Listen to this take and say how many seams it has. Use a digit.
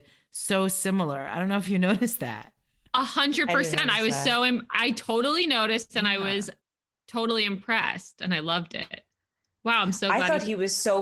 0